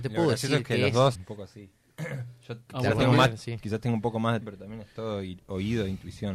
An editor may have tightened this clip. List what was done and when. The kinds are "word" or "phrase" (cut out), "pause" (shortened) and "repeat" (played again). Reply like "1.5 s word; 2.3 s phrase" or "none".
1.1 s word; 2.7 s word; 4.4 s word